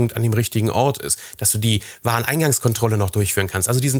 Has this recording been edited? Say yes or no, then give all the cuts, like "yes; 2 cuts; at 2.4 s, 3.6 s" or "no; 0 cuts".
no; 0 cuts